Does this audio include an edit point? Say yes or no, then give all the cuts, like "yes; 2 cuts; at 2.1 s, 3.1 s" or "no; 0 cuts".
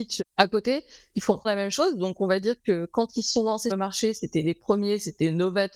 yes; 2 cuts; at 1.4 s, 3.7 s